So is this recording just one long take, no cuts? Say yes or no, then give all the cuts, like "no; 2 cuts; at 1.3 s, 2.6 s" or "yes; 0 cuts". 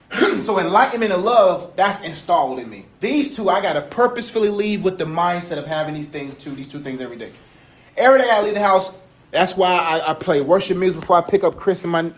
no; 1 cut; at 2.9 s